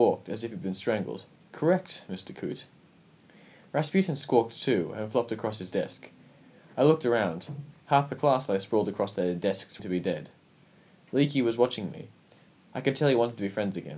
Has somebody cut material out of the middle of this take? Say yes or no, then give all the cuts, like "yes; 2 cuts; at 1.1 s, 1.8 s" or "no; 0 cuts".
yes; 2 cuts; at 1.4 s, 9.8 s